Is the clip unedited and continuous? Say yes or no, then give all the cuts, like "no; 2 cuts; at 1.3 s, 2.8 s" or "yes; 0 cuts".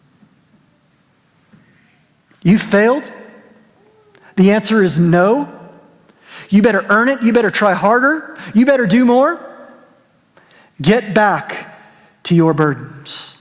yes; 0 cuts